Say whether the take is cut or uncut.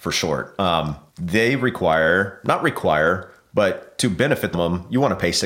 cut